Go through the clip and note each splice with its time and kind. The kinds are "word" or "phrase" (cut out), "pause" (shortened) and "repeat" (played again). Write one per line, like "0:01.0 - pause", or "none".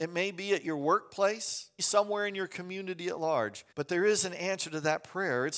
0:01.8 - word
0:03.7 - pause